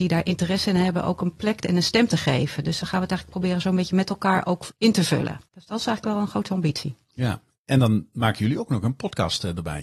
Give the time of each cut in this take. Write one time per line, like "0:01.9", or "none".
0:05.4